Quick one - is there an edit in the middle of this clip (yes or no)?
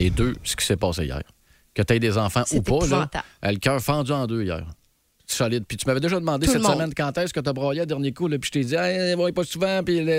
no